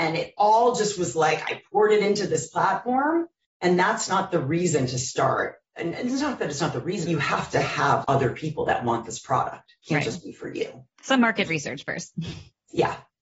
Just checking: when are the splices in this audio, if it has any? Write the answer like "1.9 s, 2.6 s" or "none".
3.4 s, 7.1 s, 8.0 s